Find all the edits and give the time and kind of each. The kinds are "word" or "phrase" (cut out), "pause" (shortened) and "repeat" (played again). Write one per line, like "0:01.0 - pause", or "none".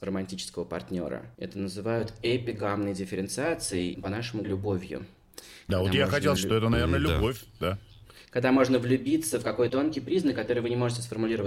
0:01.3 - pause
0:03.9 - word
0:04.4 - word
0:06.4 - word
0:09.7 - word